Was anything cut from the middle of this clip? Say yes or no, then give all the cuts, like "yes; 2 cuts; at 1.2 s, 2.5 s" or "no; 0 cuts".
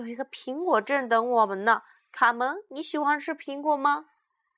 no; 0 cuts